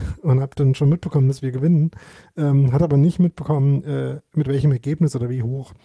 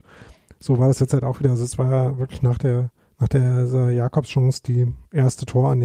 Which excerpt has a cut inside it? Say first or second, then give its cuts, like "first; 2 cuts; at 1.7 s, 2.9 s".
second; 1 cut; at 3.0 s